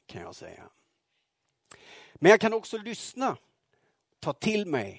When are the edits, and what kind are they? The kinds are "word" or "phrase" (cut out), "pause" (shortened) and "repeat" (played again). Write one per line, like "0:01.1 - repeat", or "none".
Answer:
none